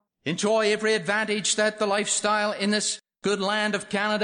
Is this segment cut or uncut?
uncut